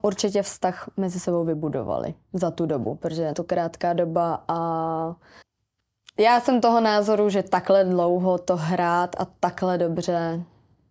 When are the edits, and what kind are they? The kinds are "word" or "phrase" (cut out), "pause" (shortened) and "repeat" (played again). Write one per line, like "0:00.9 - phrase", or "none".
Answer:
0:03.3 - word
0:05.4 - pause